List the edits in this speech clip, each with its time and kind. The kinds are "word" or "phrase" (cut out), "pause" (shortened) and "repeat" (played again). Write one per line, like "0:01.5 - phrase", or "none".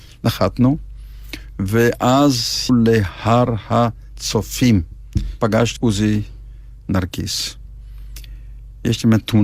0:02.7 - word
0:05.4 - word
0:05.8 - word